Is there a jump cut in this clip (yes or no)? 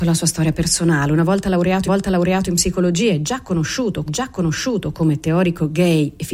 yes